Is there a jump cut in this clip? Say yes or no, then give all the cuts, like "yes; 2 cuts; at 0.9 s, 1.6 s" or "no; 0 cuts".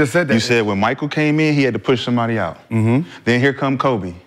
no; 0 cuts